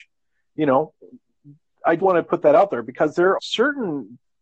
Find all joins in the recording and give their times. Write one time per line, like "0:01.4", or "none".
0:02.0
0:03.4